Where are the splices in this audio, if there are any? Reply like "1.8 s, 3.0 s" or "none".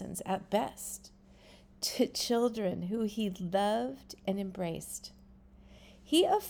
none